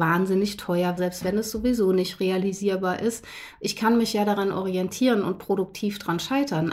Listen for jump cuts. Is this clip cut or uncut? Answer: cut